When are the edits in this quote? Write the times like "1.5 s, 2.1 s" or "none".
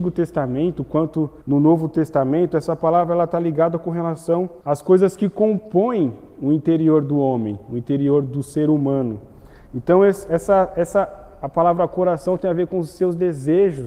1.4 s, 4.6 s